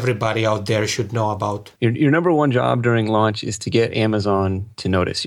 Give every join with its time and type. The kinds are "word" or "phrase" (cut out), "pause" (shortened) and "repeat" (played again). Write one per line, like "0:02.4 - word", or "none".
0:01.8 - pause